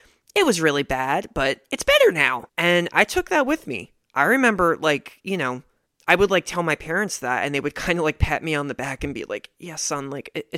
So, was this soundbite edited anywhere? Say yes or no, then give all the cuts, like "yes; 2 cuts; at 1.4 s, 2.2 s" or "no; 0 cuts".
yes; 3 cuts; at 2.5 s, 4.0 s, 5.9 s